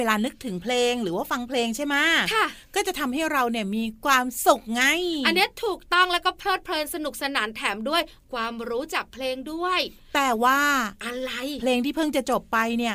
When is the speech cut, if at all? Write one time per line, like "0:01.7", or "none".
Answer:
none